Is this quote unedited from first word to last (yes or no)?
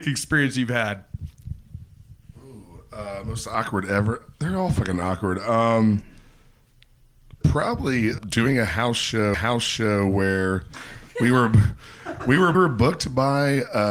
no